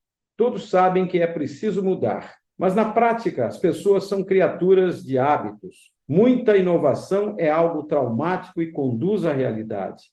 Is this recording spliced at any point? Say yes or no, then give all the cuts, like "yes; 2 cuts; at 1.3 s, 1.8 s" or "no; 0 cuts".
yes; 2 cuts; at 2.4 s, 6.0 s